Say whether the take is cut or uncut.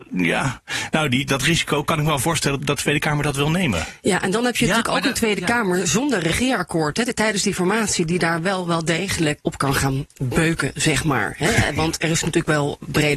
cut